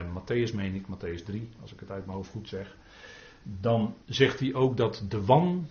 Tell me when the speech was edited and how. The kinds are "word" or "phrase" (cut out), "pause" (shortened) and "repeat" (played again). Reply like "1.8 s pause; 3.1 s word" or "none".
4.0 s pause

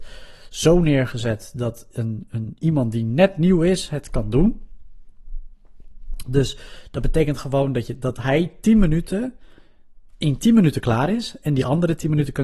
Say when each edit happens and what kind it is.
10.1 s pause

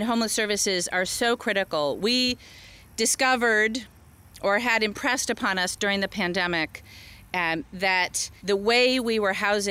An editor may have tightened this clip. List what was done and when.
8.4 s pause

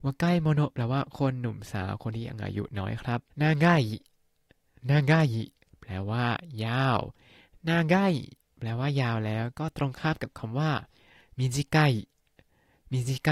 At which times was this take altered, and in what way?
3.3 s pause

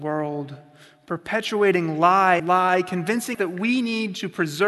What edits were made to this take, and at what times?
2.4 s word; 3.3 s word

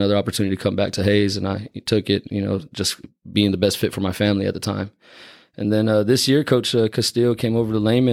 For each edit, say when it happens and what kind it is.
none

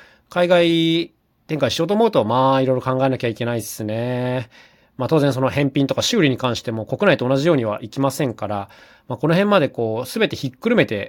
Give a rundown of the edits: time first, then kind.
none

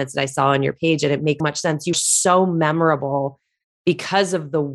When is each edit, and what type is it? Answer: 1.4 s word; 1.9 s word

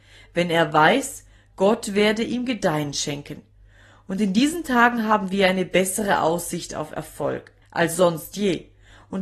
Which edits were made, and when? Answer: 7.6 s pause

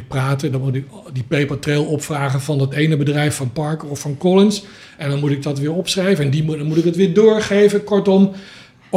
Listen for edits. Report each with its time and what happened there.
none

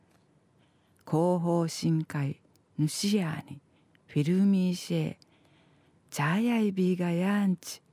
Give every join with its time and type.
none

